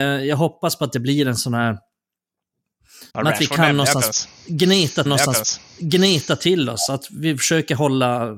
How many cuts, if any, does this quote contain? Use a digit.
2